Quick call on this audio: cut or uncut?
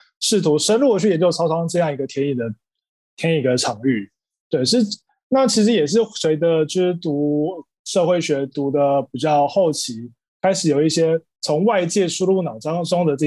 uncut